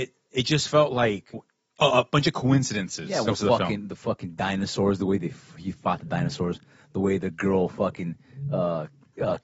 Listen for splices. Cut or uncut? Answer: cut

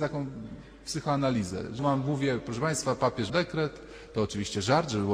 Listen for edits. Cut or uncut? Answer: cut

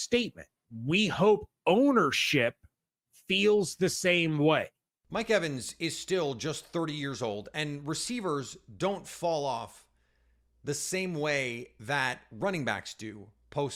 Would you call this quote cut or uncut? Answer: uncut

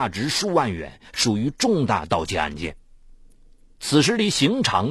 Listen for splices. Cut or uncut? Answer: uncut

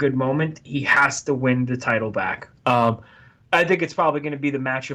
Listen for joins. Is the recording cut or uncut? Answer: uncut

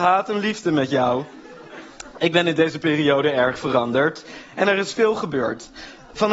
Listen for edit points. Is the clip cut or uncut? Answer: uncut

